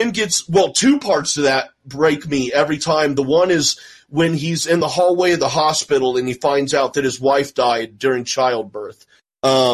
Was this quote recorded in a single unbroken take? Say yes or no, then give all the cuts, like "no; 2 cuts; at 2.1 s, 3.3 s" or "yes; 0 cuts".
yes; 0 cuts